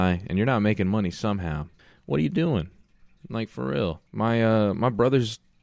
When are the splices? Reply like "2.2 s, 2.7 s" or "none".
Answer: 1.8 s, 4.1 s